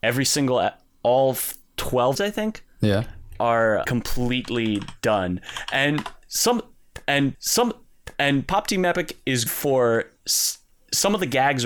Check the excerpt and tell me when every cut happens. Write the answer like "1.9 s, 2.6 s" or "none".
2.1 s, 3.8 s, 7.3 s, 9.5 s